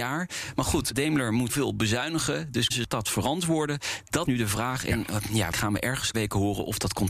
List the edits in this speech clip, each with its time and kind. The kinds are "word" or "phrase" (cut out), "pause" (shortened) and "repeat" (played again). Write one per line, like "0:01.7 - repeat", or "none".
0:00.9 - word
0:01.5 - word
0:02.7 - word
0:04.3 - word
0:05.5 - word
0:06.1 - word